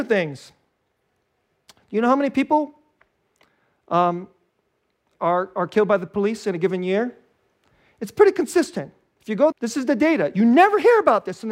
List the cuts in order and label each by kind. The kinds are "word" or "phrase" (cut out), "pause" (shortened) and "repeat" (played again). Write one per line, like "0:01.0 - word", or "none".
0:09.5 - word